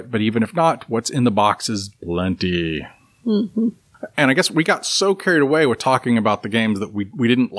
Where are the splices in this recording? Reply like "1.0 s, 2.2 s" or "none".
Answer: none